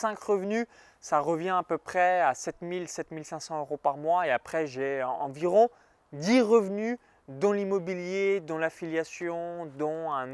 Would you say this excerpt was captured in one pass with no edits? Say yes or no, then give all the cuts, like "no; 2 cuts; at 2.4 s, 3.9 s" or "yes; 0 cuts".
yes; 0 cuts